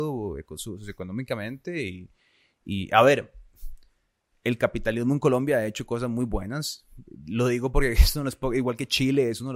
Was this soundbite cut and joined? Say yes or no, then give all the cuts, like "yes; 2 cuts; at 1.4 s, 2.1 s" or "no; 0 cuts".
no; 0 cuts